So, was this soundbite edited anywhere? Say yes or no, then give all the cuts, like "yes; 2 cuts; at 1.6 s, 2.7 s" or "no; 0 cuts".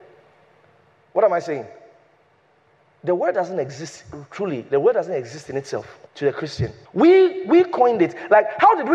yes; 2 cuts; at 6.1 s, 6.8 s